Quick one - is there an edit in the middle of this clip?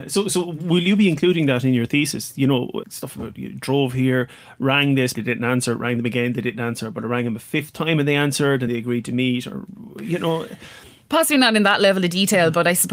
yes; 3 cuts; at 2.8 s, 5.1 s, 8.7 s

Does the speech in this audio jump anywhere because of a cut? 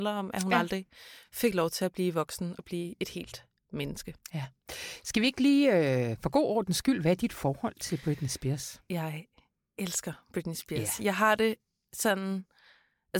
no; 0 cuts

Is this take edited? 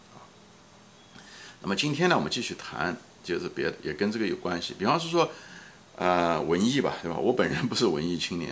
no; 0 cuts

